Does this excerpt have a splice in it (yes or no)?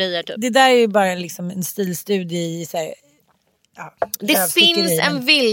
no